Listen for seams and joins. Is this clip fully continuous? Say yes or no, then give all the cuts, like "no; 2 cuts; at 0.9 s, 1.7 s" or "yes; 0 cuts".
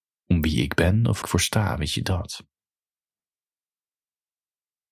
no; 1 cut; at 1.2 s